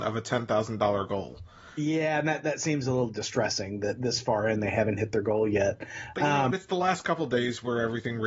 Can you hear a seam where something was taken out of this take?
no; 0 cuts

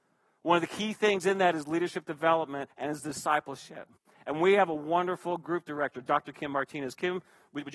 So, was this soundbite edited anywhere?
yes; 2 cuts; at 2.7 s, 4.0 s

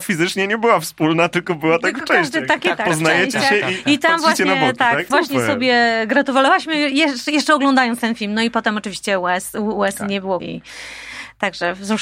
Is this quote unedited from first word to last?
no; 2 cuts; at 5.1 s, 10.4 s

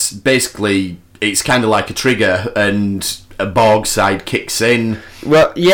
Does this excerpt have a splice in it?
yes; 1 cut; at 1.0 s

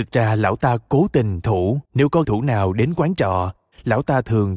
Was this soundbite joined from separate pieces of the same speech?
yes; 3 cuts; at 1.4 s, 1.9 s, 2.2 s

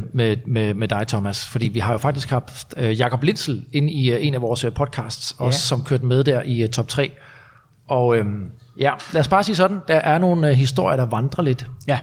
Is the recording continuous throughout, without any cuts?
yes; 0 cuts

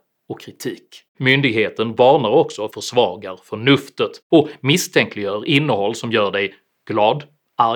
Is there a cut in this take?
yes; 3 cuts; at 1.1 s, 2.7 s, 4.2 s

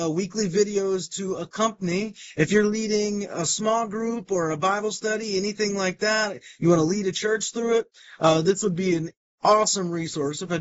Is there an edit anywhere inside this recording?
no; 0 cuts

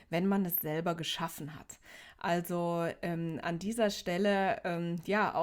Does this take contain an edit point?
no; 0 cuts

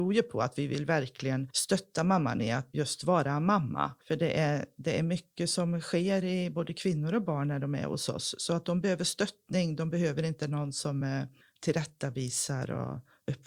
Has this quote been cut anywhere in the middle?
no; 0 cuts

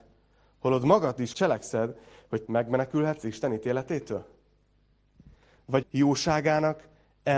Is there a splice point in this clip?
yes; 3 cuts; at 1.3 s, 2.4 s, 5.8 s

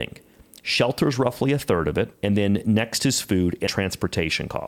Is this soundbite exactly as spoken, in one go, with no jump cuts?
no; 2 cuts; at 2.1 s, 3.7 s

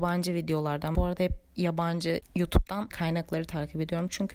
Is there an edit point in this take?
yes; 2 cuts; at 0.9 s, 2.9 s

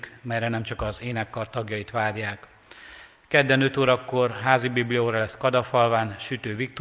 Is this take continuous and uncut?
yes; 0 cuts

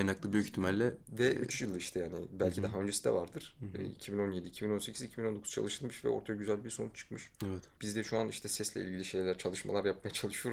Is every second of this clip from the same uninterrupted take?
yes; 0 cuts

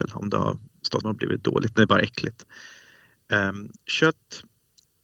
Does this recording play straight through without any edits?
no; 1 cut; at 1.0 s

